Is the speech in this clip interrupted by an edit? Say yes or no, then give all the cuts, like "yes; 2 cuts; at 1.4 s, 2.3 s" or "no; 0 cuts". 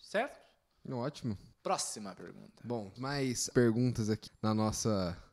yes; 4 cuts; at 1.5 s, 3.0 s, 3.5 s, 4.3 s